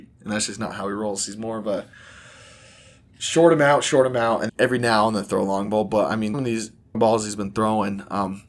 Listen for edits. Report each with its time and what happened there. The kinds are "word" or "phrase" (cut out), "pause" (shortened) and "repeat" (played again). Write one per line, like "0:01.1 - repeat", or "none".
0:04.5 - word
0:06.3 - word
0:06.9 - word